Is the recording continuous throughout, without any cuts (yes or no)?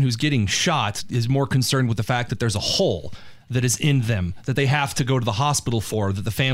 yes